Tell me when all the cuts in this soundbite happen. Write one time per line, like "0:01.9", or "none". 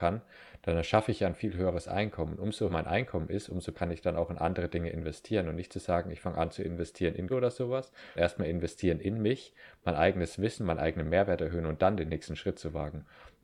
0:02.7
0:03.7
0:07.3
0:08.2

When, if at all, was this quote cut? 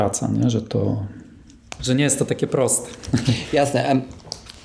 0:01.8

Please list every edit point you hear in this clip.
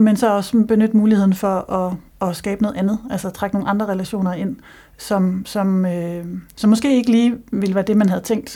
none

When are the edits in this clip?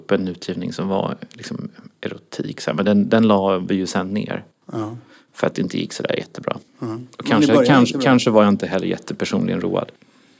0:06.7

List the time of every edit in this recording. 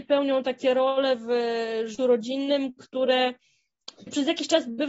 0:02.0

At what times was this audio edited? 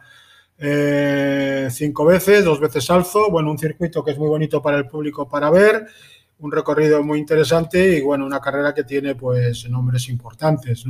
none

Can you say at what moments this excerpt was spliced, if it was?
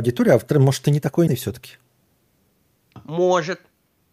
0:01.3

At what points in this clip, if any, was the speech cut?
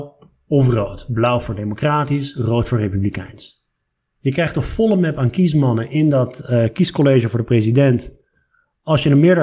none

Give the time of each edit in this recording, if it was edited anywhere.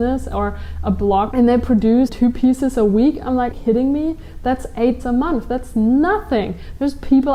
0:01.3
0:02.1
0:03.5
0:05.0

